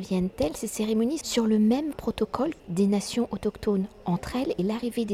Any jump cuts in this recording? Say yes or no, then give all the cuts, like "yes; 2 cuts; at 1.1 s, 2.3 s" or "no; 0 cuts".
yes; 3 cuts; at 1.2 s, 1.9 s, 2.6 s